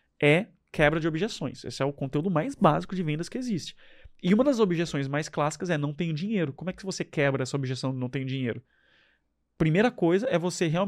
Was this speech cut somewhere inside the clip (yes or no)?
no